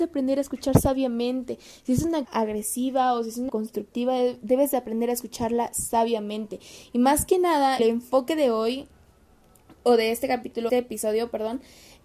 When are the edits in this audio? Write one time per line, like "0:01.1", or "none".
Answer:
0:02.2
0:03.5
0:07.8
0:10.7

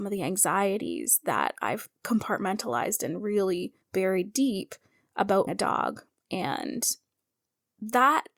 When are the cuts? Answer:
0:02.0
0:03.8
0:05.5

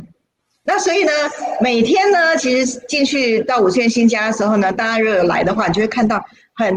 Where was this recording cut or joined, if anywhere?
none

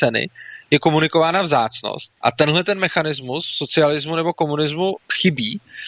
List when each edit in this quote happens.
0:02.2

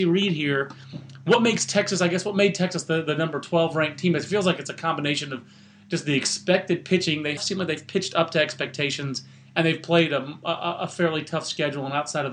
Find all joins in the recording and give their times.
0:07.4

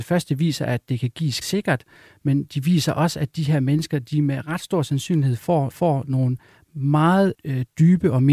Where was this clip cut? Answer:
0:01.4
0:05.7
0:07.3

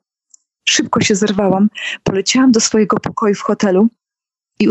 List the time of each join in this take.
none

